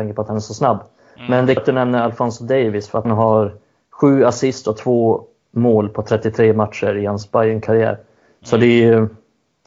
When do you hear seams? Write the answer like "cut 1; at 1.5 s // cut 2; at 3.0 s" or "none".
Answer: cut 1; at 1.6 s // cut 2; at 3.0 s